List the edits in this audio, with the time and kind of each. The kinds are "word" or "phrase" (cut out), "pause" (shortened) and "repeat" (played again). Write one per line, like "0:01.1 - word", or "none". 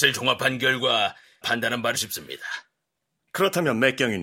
0:01.4 - word
0:01.9 - word